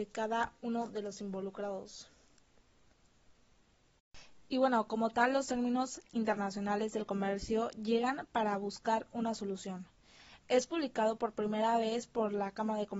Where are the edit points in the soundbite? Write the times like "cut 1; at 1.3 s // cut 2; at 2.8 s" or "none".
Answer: none